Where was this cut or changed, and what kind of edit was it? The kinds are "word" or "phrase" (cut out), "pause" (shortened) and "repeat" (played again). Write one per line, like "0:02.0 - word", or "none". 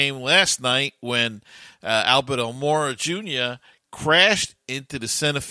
none